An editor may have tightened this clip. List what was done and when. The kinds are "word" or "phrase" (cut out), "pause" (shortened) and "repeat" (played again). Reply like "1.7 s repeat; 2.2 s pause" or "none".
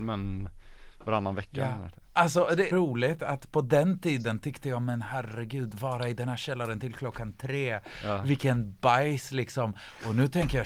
2.7 s phrase